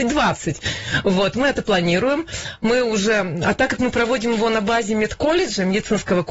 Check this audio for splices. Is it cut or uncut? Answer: uncut